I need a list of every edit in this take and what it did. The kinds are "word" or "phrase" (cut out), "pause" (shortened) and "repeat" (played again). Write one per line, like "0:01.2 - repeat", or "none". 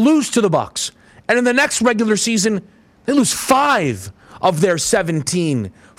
none